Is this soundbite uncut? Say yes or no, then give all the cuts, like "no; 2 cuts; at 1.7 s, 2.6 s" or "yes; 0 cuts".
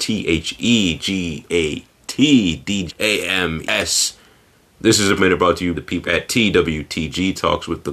no; 6 cuts; at 1.5 s, 2.9 s, 3.6 s, 5.2 s, 5.7 s, 6.1 s